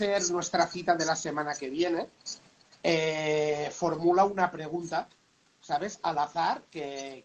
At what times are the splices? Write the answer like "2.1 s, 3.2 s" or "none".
none